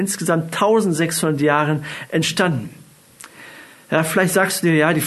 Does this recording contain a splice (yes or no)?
no